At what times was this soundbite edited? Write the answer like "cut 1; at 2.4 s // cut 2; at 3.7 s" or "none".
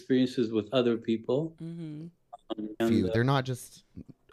cut 1; at 2.8 s